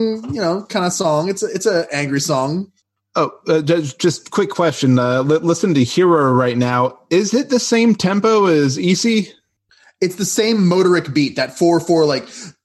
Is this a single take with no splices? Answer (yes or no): yes